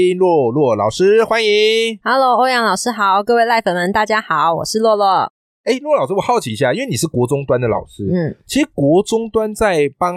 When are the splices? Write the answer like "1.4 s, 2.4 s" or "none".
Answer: none